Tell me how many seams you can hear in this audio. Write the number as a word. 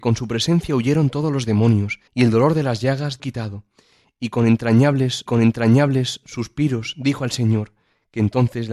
three